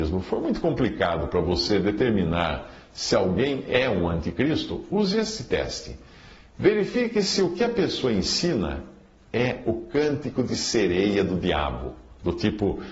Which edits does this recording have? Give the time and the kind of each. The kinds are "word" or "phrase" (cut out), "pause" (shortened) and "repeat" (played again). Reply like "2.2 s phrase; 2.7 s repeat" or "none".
none